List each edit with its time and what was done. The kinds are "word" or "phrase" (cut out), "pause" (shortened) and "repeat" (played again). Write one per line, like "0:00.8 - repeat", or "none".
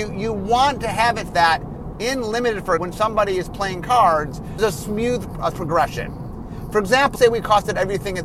0:01.3 - word
0:01.9 - word
0:02.8 - word
0:04.6 - word
0:05.5 - word
0:07.2 - word